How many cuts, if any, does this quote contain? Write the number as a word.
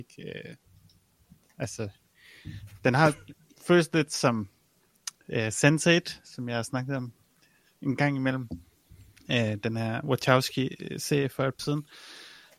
one